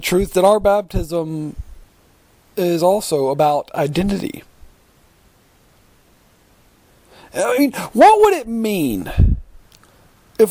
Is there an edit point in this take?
no; 0 cuts

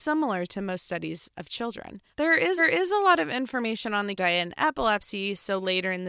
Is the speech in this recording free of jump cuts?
no; 3 cuts; at 2.1 s, 2.6 s, 4.2 s

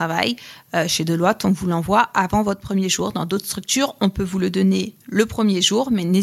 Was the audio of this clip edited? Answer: no; 0 cuts

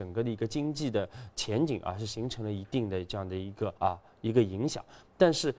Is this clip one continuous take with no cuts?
no; 1 cut; at 3.8 s

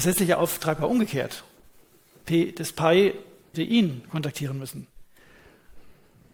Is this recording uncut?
no; 1 cut; at 3.5 s

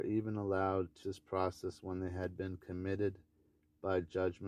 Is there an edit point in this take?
yes; 1 cut; at 1.0 s

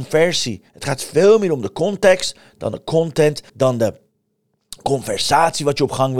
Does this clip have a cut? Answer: yes; 1 cut; at 3.5 s

